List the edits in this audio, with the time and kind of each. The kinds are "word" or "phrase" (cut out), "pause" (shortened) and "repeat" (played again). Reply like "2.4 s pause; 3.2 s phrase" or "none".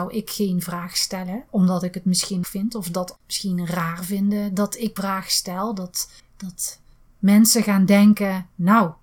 1.5 s pause; 2.4 s phrase; 3.2 s word; 5.0 s word; 6.2 s pause